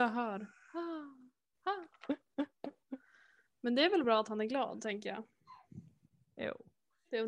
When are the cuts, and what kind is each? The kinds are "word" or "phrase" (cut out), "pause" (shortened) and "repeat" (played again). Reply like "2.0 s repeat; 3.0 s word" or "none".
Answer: none